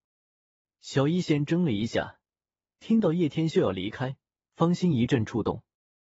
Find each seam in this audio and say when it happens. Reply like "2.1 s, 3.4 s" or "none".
none